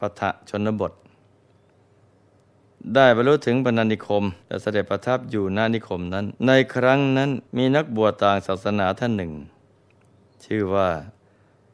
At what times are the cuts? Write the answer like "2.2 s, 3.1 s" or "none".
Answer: 4.4 s, 6.4 s, 7.5 s